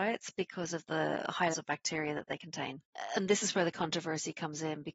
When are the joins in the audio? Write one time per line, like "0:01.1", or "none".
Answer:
0:01.5

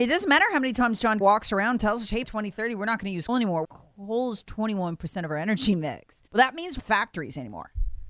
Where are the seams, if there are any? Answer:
0:01.2
0:02.2
0:03.3
0:03.6
0:06.3
0:06.8

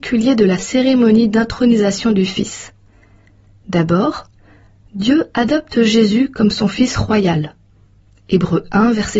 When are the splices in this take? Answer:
none

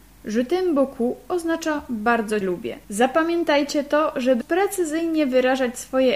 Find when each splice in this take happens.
0:02.4
0:02.8
0:04.4

